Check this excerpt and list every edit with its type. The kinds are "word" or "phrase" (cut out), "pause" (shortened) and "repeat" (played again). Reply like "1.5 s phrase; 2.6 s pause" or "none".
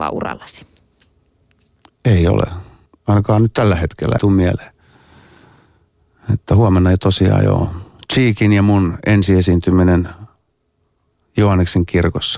2.9 s pause; 4.2 s word